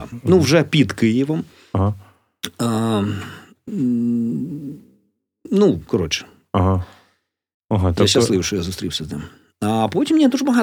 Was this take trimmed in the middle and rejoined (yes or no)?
no